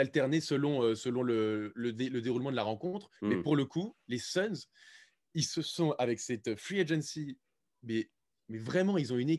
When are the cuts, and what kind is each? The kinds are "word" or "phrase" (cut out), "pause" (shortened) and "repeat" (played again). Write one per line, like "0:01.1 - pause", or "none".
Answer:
0:03.2 - pause